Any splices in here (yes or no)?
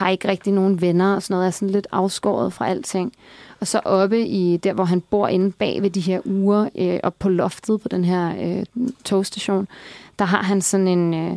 no